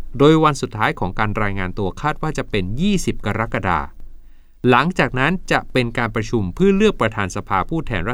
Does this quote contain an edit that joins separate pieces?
no; 0 cuts

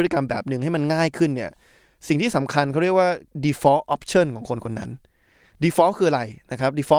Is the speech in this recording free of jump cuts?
yes; 0 cuts

